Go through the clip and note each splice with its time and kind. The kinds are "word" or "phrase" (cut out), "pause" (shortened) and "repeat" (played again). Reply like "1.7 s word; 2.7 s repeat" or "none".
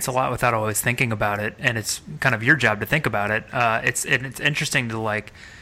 none